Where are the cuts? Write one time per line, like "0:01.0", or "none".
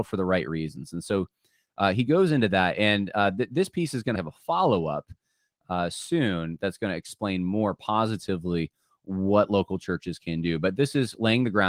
0:04.1